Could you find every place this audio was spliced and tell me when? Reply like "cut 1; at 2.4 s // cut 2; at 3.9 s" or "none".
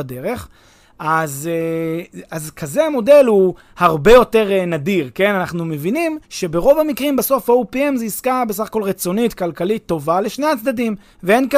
cut 1; at 2.3 s // cut 2; at 6.2 s